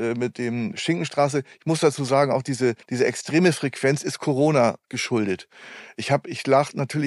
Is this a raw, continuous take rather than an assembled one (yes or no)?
no